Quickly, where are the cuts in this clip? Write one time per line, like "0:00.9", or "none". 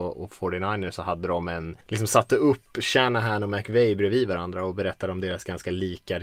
0:01.8